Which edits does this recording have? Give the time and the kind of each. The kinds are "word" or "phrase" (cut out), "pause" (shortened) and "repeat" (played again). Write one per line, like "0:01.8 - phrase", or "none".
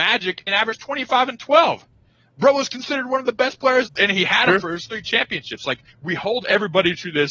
0:03.9 - phrase
0:04.9 - word
0:05.9 - pause